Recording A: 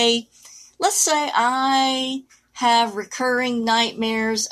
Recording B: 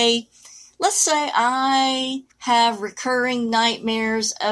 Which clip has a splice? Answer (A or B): B